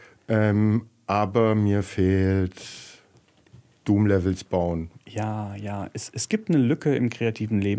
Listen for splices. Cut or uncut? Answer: uncut